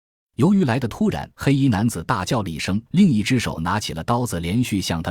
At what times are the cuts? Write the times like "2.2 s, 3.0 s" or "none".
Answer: 1.3 s, 2.9 s